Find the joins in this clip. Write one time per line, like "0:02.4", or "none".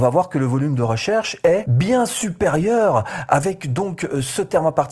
none